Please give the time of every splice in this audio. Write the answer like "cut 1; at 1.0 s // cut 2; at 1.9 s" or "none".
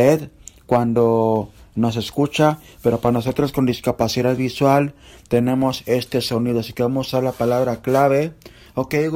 none

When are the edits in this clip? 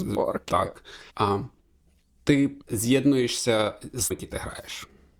cut 1; at 1.1 s // cut 2; at 2.6 s // cut 3; at 4.1 s

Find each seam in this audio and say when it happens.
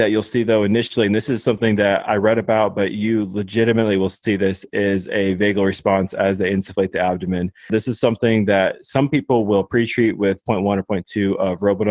cut 1; at 10.4 s

